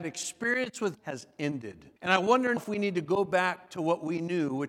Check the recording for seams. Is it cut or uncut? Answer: cut